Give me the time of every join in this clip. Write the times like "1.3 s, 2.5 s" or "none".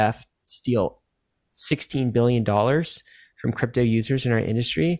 none